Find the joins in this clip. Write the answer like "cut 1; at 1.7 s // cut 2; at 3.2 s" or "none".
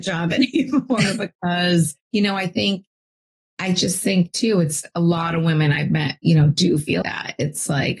cut 1; at 2.0 s // cut 2; at 7.0 s